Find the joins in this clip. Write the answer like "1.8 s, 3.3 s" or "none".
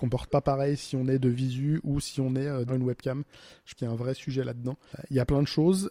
2.7 s, 3.7 s